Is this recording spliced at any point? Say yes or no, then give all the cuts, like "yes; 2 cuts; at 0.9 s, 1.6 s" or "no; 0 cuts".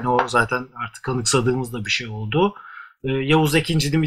no; 0 cuts